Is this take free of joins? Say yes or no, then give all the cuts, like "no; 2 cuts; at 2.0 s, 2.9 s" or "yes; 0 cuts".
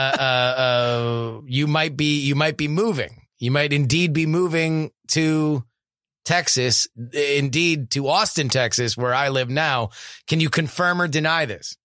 no; 1 cut; at 1.4 s